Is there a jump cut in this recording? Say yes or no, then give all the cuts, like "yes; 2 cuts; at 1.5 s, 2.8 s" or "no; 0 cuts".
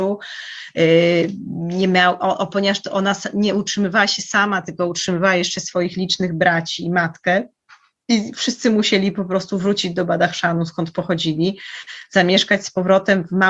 no; 0 cuts